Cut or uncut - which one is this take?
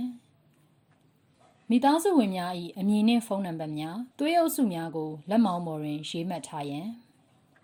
cut